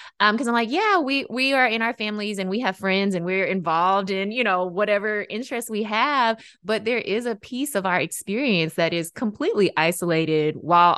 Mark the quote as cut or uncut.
uncut